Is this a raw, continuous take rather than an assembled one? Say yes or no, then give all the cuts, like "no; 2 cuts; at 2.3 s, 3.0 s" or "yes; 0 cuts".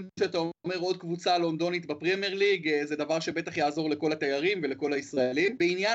yes; 0 cuts